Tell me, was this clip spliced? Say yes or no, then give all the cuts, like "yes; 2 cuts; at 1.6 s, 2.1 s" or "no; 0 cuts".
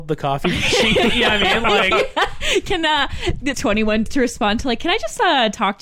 yes; 2 cuts; at 3.5 s, 4.1 s